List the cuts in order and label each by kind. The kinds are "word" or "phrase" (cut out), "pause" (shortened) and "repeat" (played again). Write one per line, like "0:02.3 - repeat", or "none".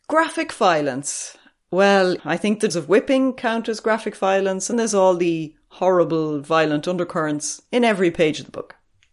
0:02.2 - word
0:02.7 - word
0:04.7 - word